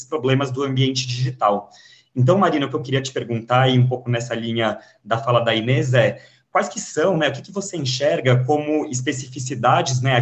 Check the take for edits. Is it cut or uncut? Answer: uncut